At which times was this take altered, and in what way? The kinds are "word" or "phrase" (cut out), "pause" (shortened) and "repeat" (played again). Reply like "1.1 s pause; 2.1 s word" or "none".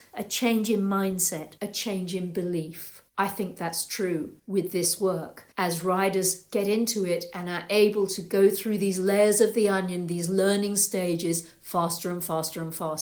1.6 s pause; 3.1 s pause; 4.4 s pause; 5.5 s pause